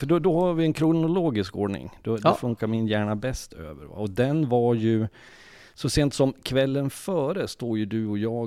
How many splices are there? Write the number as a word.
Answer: zero